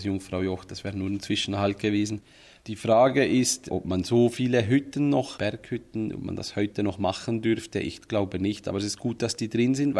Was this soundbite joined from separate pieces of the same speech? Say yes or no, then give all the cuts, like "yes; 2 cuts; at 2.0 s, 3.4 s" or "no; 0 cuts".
no; 0 cuts